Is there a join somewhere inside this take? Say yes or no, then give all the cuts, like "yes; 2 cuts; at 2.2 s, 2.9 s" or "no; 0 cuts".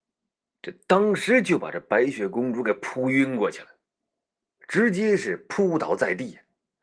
no; 0 cuts